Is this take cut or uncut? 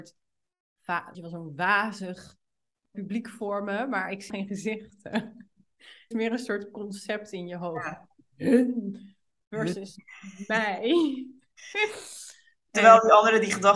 cut